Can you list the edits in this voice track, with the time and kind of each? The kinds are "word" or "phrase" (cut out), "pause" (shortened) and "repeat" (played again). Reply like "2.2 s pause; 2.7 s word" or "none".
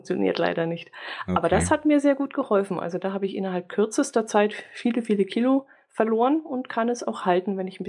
none